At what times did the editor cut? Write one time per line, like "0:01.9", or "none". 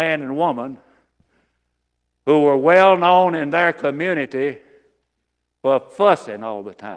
none